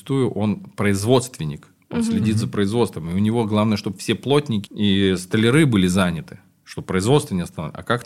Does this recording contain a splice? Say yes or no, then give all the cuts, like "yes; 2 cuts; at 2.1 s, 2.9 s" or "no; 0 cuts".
yes; 1 cut; at 4.7 s